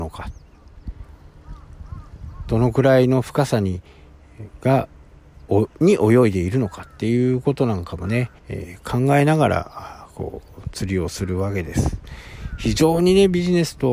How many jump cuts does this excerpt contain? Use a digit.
2